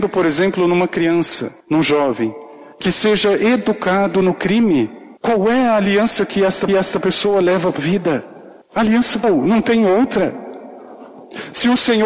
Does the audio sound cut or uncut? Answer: cut